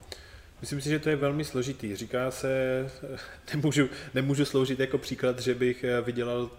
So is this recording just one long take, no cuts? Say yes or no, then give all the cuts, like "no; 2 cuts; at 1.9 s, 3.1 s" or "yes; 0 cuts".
yes; 0 cuts